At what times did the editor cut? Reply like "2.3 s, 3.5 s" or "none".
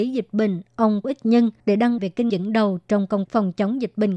1.0 s, 1.6 s, 2.0 s, 2.3 s, 3.3 s